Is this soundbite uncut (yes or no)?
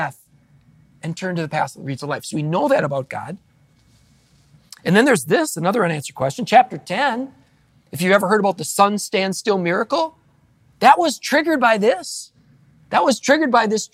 yes